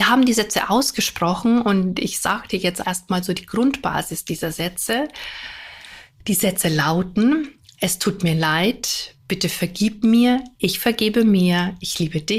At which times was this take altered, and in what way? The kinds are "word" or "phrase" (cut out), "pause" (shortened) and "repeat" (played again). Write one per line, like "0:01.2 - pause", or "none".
0:02.8 - word